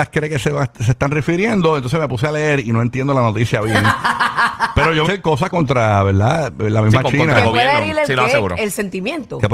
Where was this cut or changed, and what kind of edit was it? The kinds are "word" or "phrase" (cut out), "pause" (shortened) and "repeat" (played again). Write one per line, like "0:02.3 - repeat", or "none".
0:05.0 - phrase
0:05.5 - phrase

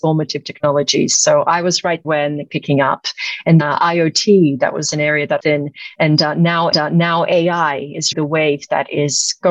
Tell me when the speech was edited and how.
0:02.0 - word
0:02.5 - phrase
0:03.6 - word
0:05.4 - phrase
0:06.7 - repeat
0:08.1 - word

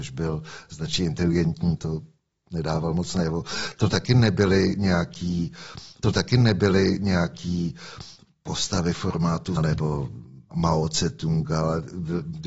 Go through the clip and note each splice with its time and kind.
0:01.8 - phrase
0:06.0 - repeat
0:09.6 - word

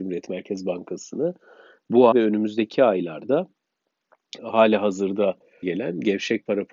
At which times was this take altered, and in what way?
0:02.1 - word
0:04.4 - word
0:05.6 - word

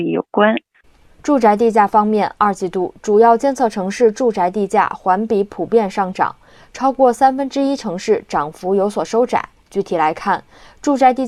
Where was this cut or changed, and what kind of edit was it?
none

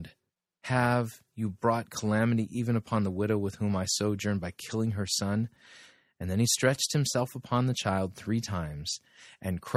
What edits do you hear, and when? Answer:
none

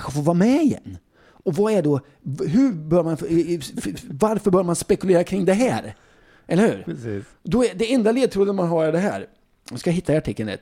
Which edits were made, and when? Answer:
none

